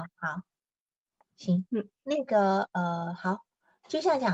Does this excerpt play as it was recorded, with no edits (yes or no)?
no